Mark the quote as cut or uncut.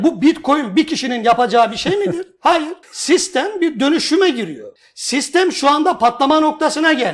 cut